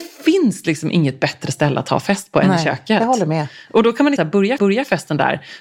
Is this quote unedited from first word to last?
no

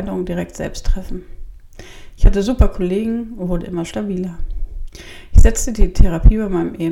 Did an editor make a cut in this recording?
no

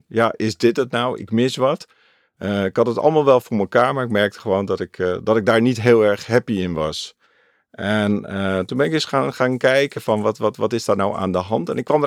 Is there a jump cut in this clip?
no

